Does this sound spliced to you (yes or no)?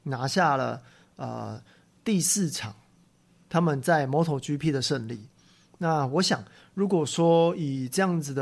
no